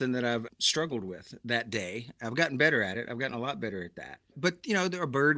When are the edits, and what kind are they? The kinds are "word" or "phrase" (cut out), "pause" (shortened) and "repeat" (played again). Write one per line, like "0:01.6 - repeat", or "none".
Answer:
none